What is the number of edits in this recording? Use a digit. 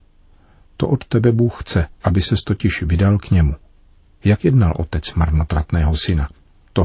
1